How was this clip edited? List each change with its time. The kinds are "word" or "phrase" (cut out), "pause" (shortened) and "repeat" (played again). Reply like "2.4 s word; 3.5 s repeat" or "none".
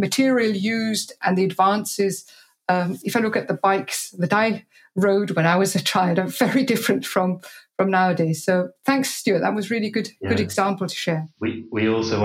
none